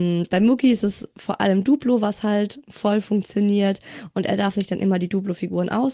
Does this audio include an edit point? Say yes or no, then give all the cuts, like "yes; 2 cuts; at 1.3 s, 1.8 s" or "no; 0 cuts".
no; 0 cuts